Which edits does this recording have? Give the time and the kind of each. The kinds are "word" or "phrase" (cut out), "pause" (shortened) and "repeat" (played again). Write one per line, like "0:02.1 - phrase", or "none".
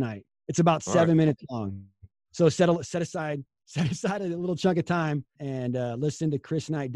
0:05.4 - word